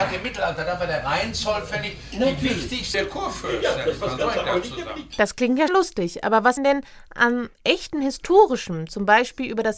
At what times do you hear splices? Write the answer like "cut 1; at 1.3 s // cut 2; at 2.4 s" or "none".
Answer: cut 1; at 2.9 s // cut 2; at 5.7 s // cut 3; at 6.6 s